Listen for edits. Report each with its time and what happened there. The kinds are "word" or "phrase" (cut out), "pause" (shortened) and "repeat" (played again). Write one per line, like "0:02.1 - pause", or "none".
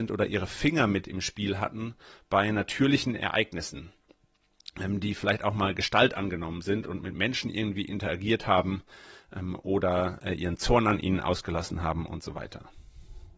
none